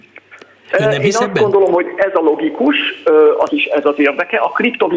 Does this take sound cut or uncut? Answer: cut